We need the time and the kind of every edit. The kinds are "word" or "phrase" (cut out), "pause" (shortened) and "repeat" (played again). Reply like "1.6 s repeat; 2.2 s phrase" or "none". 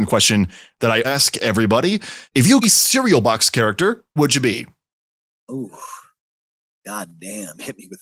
1.0 s word; 2.3 s pause; 2.6 s phrase; 4.2 s word; 6.5 s pause